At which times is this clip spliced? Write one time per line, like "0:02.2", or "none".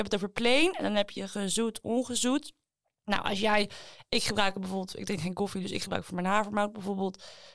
none